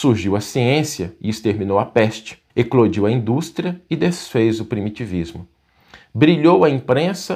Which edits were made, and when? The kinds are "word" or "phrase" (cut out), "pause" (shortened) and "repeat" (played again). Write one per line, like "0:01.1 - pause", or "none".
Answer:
0:02.5 - pause